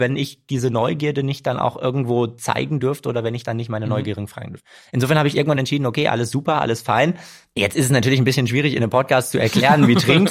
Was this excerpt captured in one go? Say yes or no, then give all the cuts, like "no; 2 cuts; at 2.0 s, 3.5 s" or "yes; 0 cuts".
yes; 0 cuts